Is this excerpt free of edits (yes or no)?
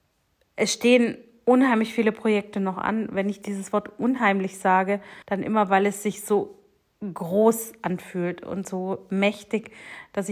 no